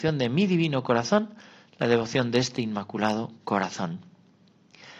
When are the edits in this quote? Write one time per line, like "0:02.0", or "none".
none